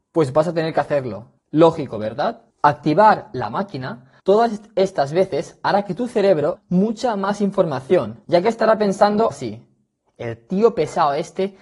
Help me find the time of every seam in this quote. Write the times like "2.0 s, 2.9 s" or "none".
1.4 s, 2.5 s, 4.2 s, 6.6 s, 8.2 s, 9.3 s